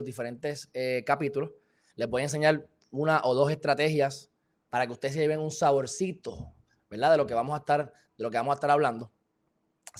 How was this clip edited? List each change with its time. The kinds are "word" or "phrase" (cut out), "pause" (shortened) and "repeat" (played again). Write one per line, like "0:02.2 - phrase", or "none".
none